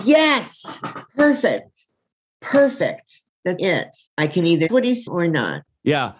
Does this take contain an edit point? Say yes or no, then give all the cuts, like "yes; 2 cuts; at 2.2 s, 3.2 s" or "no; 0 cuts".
yes; 5 cuts; at 1.1 s, 3.6 s, 4.1 s, 4.7 s, 5.1 s